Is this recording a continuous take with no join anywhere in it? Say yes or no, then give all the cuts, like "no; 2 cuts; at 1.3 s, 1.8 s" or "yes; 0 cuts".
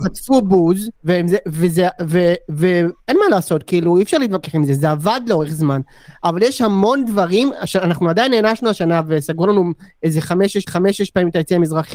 no; 3 cuts; at 1.0 s, 3.0 s, 10.7 s